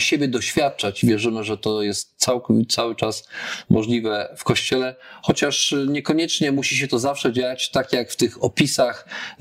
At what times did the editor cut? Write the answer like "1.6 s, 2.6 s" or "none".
none